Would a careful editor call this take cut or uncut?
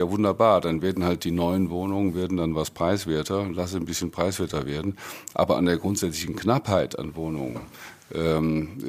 uncut